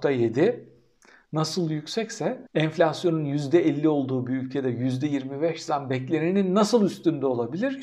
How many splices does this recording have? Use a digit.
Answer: 1